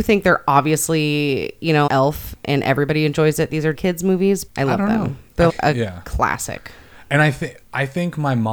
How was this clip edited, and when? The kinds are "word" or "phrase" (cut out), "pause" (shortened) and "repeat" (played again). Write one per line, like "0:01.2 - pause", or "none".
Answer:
0:01.9 - phrase
0:03.7 - word
0:04.5 - word
0:05.5 - word